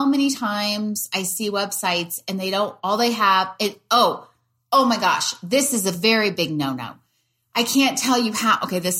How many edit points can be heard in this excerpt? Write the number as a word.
zero